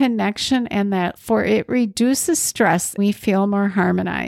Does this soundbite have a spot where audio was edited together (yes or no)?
yes